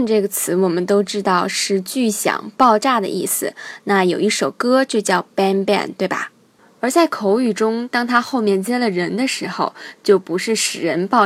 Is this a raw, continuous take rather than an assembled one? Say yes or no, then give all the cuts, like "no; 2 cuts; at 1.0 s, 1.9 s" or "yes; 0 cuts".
yes; 0 cuts